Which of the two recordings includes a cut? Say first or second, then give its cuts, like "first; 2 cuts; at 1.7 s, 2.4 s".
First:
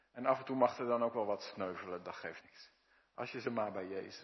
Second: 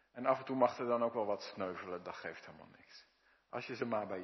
first; 1 cut; at 2.4 s